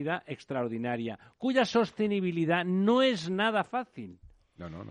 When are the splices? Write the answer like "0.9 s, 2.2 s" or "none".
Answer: none